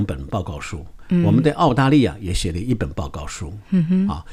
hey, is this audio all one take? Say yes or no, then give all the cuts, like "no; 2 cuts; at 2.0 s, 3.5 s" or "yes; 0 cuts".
yes; 0 cuts